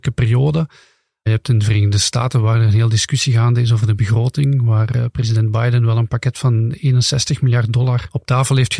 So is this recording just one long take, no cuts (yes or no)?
yes